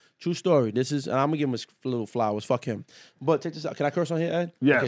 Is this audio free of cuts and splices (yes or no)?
yes